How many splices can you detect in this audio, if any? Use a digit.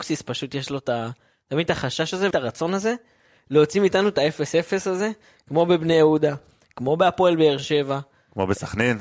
1